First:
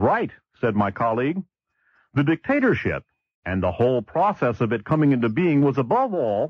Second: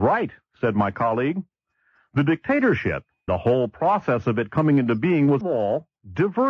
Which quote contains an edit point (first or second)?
second